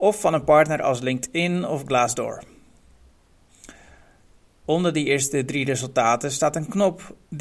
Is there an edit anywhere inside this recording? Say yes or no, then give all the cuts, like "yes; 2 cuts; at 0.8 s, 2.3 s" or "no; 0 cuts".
no; 0 cuts